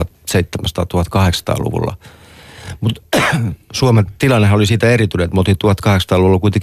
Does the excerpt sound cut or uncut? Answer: uncut